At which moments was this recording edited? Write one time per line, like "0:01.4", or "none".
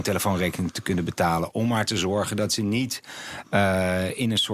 none